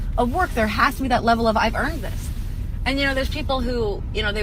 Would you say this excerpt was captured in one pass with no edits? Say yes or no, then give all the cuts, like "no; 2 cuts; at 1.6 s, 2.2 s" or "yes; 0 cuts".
yes; 0 cuts